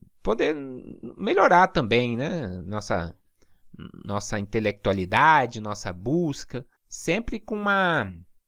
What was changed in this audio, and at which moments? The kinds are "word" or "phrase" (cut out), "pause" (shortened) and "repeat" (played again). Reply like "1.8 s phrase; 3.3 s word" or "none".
6.8 s pause